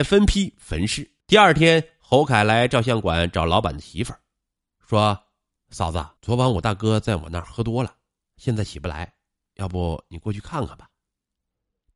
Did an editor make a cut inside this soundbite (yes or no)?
yes